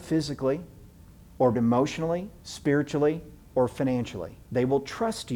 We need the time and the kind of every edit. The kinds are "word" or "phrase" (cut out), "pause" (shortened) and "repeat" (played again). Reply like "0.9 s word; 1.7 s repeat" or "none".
1.5 s word; 2.4 s pause; 4.4 s pause